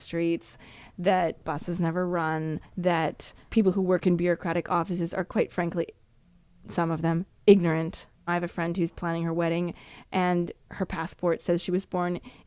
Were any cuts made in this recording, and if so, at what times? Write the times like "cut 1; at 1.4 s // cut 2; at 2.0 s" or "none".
cut 1; at 2.6 s // cut 2; at 8.1 s // cut 3; at 10.6 s